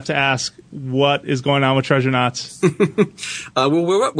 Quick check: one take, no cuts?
yes; 0 cuts

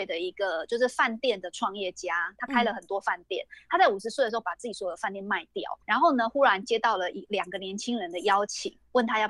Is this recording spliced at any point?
yes; 1 cut; at 5.8 s

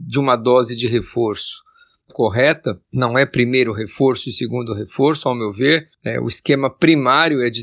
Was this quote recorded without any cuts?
no; 1 cut; at 2.1 s

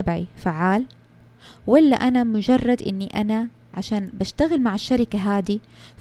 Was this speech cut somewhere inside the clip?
yes; 1 cut; at 3.7 s

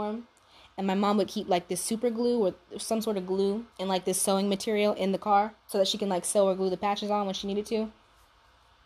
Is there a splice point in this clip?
yes; 2 cuts; at 3.7 s, 5.6 s

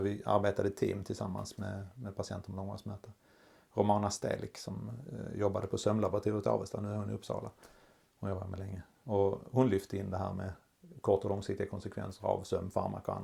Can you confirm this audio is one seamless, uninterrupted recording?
yes; 0 cuts

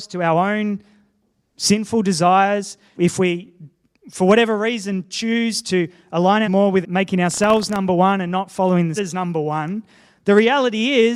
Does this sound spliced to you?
yes; 4 cuts; at 2.9 s, 6.4 s, 6.8 s, 9.0 s

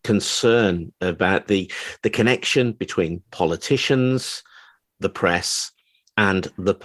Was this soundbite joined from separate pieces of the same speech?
no; 0 cuts

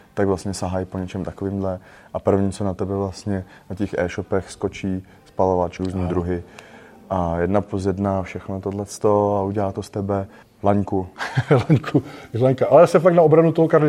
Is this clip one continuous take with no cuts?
no; 2 cuts; at 5.8 s, 10.4 s

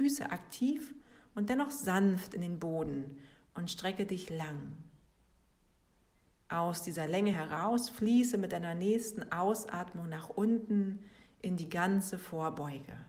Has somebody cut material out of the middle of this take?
no; 0 cuts

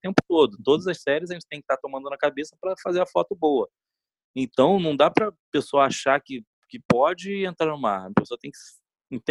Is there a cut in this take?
no; 0 cuts

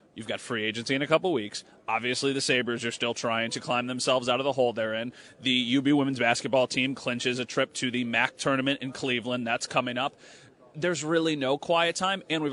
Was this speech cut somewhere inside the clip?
no; 0 cuts

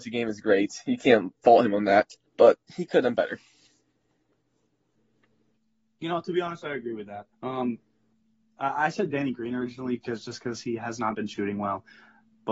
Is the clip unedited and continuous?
no; 2 cuts; at 2.3 s, 7.3 s

